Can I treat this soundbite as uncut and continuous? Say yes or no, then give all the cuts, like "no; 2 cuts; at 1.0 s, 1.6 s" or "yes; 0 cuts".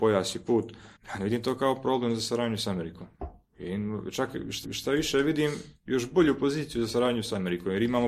no; 2 cuts; at 1.0 s, 4.6 s